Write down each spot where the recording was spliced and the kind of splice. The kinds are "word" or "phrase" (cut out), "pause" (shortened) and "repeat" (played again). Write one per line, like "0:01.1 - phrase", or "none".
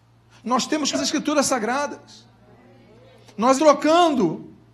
0:00.9 - word
0:03.6 - word